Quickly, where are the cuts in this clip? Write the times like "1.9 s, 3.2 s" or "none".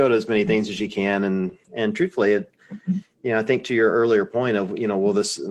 1.6 s